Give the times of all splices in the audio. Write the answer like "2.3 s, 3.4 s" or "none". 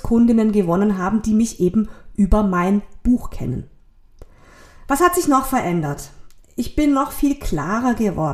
none